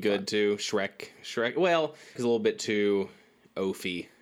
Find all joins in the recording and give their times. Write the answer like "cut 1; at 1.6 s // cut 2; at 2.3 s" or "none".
cut 1; at 2.2 s